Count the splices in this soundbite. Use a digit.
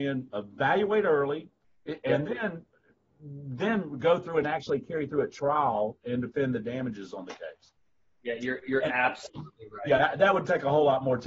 0